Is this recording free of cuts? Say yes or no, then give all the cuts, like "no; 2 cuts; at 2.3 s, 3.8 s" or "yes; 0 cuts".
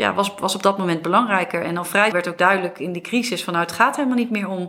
no; 1 cut; at 2.1 s